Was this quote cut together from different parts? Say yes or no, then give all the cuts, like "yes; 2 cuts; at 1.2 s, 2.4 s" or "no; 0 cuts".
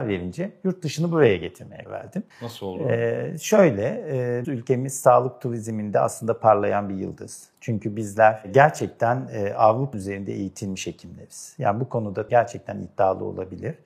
yes; 5 cuts; at 1.9 s, 2.3 s, 4.4 s, 9.9 s, 12.3 s